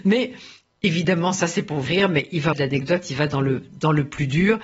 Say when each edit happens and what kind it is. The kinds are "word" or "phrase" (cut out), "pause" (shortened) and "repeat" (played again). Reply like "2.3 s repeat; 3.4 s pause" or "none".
1.9 s word; 2.5 s word